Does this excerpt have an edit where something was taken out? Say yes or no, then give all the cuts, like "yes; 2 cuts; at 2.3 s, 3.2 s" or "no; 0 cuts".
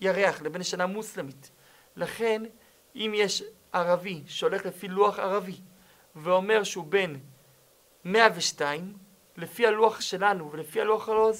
no; 0 cuts